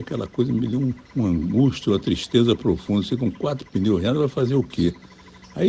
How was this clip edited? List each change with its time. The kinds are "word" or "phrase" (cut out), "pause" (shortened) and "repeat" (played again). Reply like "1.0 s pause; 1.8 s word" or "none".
1.0 s pause